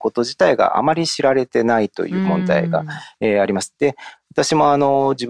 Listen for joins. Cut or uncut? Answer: uncut